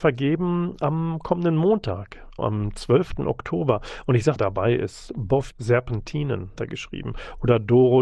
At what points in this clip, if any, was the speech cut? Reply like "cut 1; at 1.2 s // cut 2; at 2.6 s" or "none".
cut 1; at 2.4 s // cut 2; at 4.4 s // cut 3; at 5.5 s // cut 4; at 6.6 s